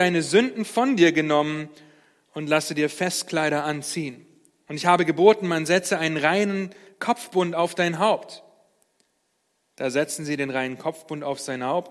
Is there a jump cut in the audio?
no; 0 cuts

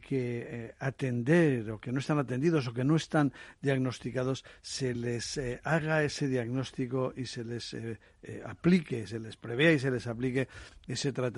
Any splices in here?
no; 0 cuts

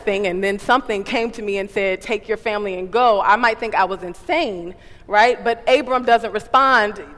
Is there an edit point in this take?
no; 0 cuts

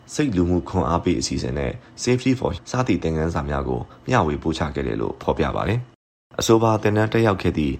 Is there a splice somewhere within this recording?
yes; 1 cut; at 2.6 s

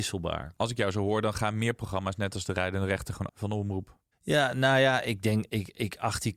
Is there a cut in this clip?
yes; 1 cut; at 3.3 s

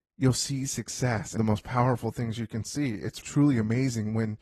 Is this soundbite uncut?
no; 2 cuts; at 1.4 s, 3.2 s

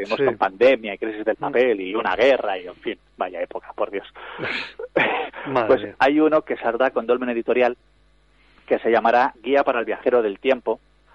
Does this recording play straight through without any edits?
yes; 0 cuts

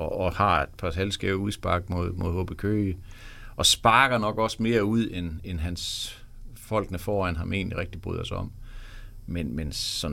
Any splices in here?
no; 0 cuts

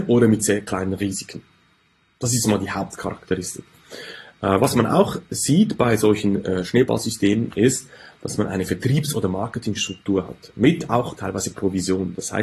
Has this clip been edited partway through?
no; 0 cuts

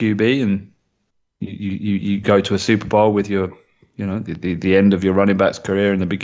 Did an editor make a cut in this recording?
yes; 1 cut; at 2.2 s

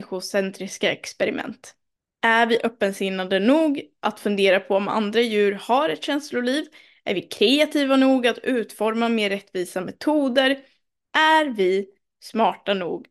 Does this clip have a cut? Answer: no; 0 cuts

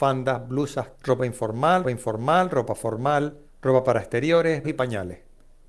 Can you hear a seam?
yes; 4 cuts; at 0.9 s, 1.8 s, 3.5 s, 4.6 s

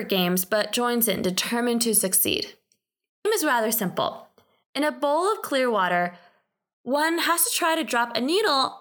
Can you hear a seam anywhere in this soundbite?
yes; 1 cut; at 3.3 s

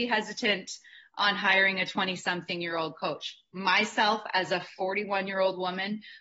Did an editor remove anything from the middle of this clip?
no; 0 cuts

